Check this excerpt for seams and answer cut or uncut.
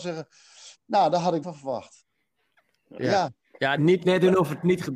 cut